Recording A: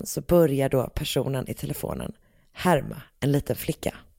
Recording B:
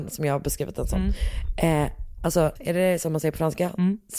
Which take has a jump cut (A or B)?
B